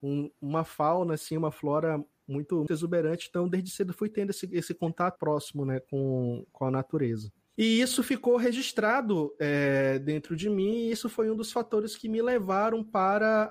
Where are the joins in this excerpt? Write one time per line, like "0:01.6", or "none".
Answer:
0:02.7
0:05.2